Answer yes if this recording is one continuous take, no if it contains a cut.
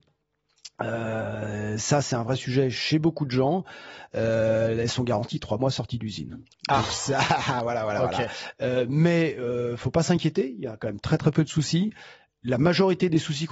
yes